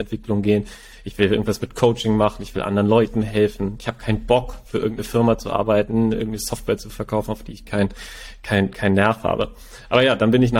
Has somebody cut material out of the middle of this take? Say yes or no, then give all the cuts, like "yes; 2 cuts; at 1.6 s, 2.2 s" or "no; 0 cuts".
no; 0 cuts